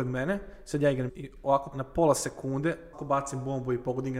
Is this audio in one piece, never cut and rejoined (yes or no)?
no